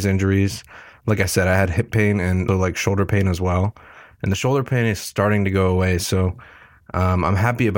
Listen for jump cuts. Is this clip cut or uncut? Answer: cut